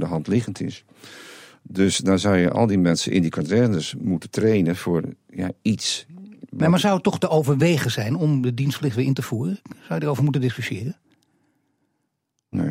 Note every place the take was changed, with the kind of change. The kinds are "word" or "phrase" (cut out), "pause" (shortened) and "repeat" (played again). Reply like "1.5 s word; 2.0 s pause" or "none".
none